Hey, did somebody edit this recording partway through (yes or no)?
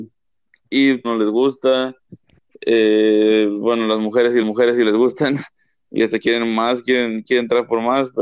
yes